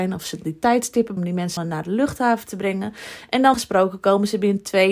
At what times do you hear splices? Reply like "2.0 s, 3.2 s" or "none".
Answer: 1.2 s, 1.6 s, 3.5 s